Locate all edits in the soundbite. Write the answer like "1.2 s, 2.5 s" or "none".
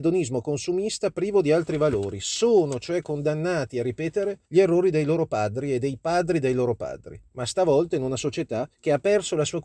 4.4 s, 8.7 s